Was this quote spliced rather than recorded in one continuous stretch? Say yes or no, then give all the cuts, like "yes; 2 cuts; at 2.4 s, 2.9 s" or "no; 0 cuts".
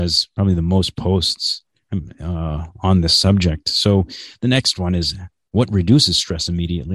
no; 0 cuts